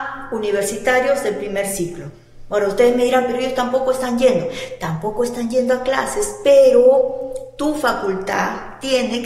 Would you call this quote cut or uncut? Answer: uncut